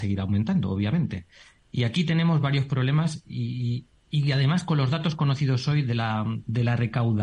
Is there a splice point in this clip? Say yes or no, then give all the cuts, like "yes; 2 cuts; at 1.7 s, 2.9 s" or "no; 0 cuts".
no; 0 cuts